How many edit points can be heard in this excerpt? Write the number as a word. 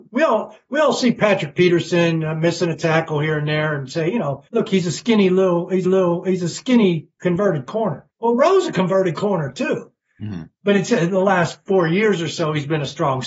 four